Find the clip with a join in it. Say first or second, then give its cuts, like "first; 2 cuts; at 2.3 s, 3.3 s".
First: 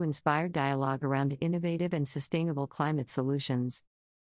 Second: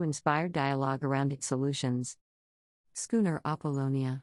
second; 1 cut; at 1.4 s